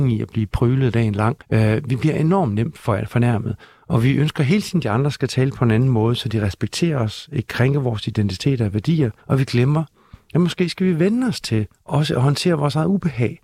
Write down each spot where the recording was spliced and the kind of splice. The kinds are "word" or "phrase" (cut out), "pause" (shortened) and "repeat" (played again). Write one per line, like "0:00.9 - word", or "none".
0:01.4 - pause
0:03.6 - pause
0:09.2 - pause
0:11.7 - pause